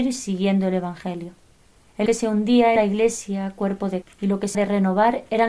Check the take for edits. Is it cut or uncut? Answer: cut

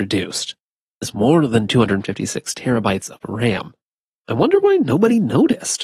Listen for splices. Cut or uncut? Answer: cut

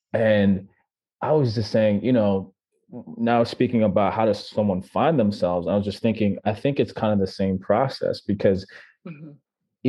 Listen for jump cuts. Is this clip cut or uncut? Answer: uncut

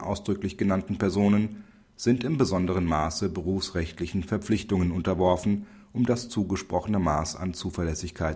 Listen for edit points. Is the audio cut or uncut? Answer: uncut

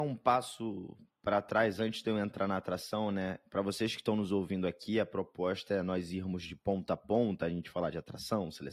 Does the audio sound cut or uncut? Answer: cut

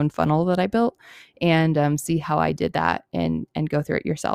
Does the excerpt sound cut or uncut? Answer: uncut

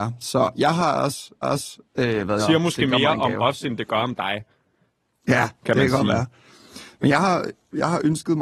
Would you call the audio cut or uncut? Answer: cut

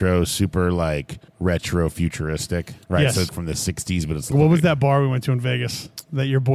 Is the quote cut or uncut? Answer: cut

